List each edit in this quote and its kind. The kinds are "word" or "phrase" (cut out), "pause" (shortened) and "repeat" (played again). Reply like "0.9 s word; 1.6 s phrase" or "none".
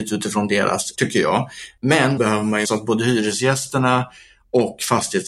0.9 s word; 2.2 s word; 2.6 s word